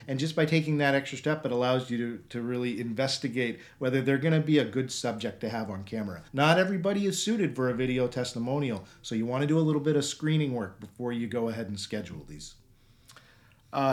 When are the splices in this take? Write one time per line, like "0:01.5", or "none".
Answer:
0:06.3